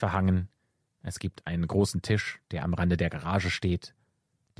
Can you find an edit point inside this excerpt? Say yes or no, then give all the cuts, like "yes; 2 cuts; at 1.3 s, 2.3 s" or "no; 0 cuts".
no; 0 cuts